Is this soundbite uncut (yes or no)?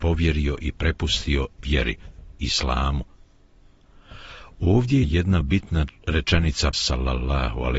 no